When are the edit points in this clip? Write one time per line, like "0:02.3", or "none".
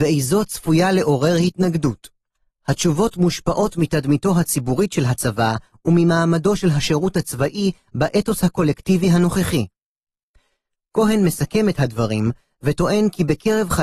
none

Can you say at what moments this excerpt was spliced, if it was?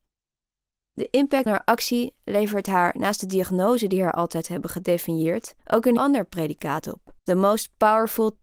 0:01.5
0:05.6
0:06.0
0:07.2

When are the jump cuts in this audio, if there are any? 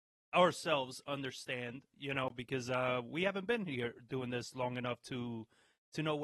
none

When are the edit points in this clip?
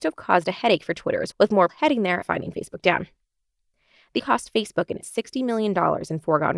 0:01.3
0:01.7
0:02.2
0:04.2
0:05.0

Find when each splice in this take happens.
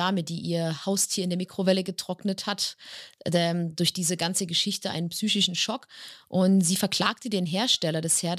none

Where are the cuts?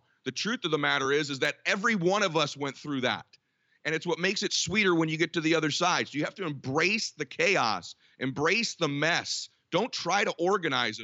none

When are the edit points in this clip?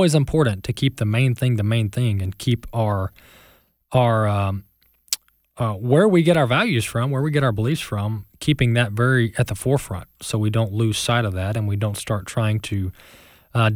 none

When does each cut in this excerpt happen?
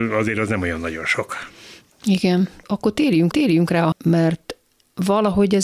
0:03.3
0:03.9

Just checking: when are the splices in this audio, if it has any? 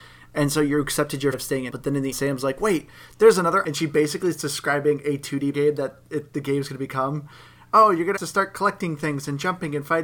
0:01.3
0:01.7
0:02.1
0:03.6
0:05.5
0:08.2

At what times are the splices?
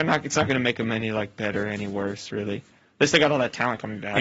none

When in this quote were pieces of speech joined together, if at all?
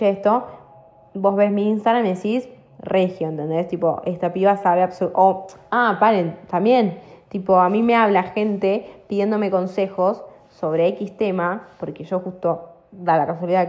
none

